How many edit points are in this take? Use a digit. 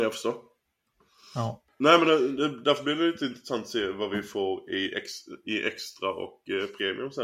1